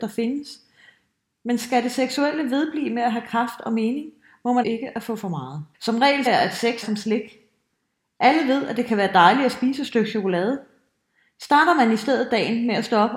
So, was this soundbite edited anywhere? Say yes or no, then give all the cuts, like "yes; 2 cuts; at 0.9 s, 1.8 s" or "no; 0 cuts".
yes; 4 cuts; at 4.6 s, 5.7 s, 6.3 s, 6.8 s